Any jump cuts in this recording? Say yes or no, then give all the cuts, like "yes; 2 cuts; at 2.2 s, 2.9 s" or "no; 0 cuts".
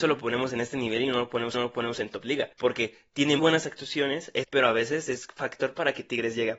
yes; 4 cuts; at 1.5 s, 2.5 s, 3.4 s, 4.4 s